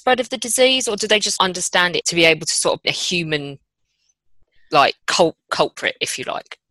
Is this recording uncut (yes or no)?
no